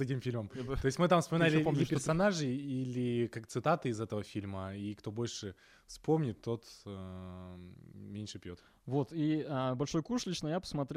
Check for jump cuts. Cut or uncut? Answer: uncut